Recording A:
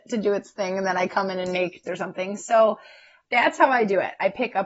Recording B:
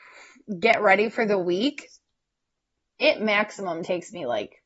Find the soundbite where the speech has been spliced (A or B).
A